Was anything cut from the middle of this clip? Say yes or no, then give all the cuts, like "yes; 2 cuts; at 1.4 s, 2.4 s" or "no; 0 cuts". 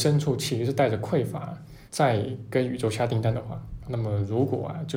yes; 2 cuts; at 1.9 s, 3.8 s